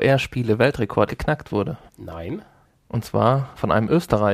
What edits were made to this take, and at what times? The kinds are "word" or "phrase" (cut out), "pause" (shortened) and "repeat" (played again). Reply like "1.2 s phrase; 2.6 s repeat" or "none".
1.1 s word; 1.9 s pause